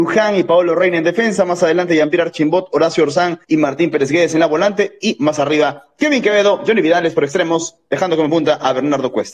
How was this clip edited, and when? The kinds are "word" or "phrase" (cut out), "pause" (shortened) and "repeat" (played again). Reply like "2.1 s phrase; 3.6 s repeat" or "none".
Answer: 3.4 s pause